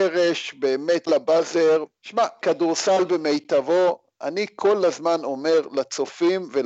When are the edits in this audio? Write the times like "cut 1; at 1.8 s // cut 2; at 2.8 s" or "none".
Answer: cut 1; at 1.1 s